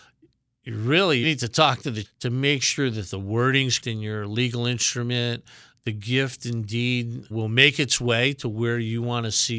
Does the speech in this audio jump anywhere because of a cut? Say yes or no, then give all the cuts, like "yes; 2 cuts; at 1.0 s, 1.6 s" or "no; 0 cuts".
yes; 5 cuts; at 1.2 s, 2.0 s, 3.8 s, 5.7 s, 7.3 s